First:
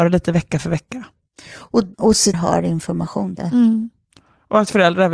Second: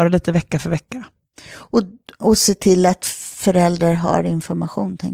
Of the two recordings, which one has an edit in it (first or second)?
first